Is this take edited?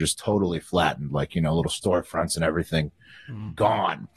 no; 0 cuts

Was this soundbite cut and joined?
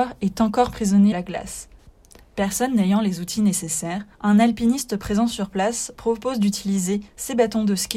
yes; 3 cuts; at 1.1 s, 4.1 s, 7.1 s

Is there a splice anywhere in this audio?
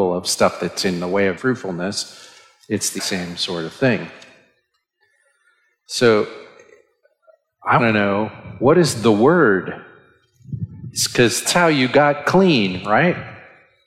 yes; 4 cuts; at 1.4 s, 3.0 s, 7.8 s, 11.4 s

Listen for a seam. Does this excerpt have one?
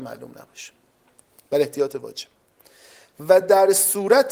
no; 0 cuts

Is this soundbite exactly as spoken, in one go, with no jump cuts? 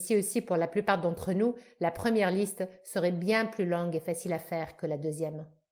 yes; 0 cuts

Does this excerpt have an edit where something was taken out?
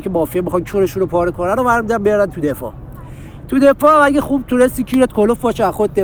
no; 0 cuts

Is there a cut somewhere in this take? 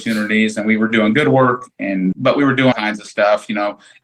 yes; 2 cuts; at 2.1 s, 2.7 s

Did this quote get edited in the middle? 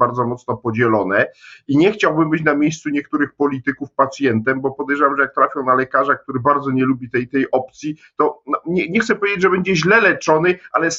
no; 0 cuts

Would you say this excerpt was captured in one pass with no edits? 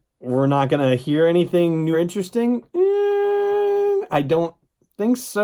no; 1 cut; at 1.9 s

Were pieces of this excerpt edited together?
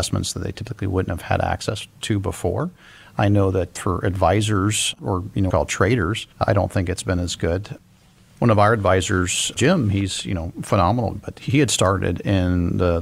yes; 4 cuts; at 3.8 s, 5.5 s, 6.3 s, 11.1 s

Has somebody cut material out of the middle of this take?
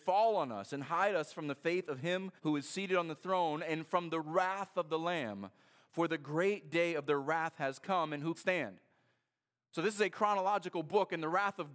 yes; 2 cuts; at 2.4 s, 8.3 s

